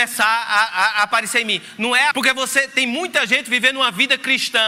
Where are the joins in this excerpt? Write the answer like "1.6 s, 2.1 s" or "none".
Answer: 2.1 s